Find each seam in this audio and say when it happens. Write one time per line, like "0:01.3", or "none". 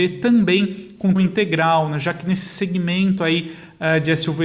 0:01.2